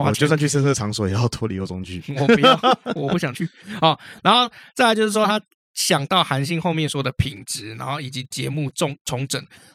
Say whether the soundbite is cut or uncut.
uncut